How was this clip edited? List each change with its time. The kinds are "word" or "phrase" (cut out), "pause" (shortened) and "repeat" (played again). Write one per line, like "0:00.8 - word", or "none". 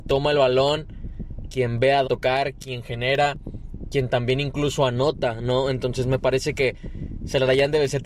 0:02.0 - word